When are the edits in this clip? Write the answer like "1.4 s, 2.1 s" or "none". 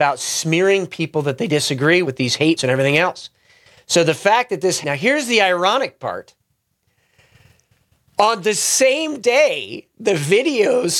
2.0 s, 2.6 s, 4.8 s